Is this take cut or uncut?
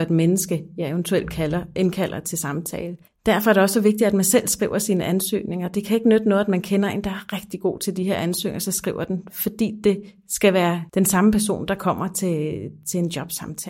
cut